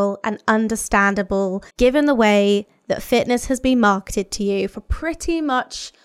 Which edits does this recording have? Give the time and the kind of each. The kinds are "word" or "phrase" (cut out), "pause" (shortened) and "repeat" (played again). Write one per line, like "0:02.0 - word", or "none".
0:01.7 - pause